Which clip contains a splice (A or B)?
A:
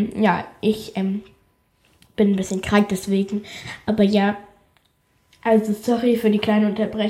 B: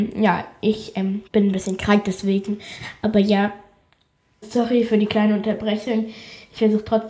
B